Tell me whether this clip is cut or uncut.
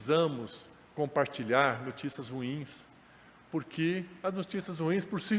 uncut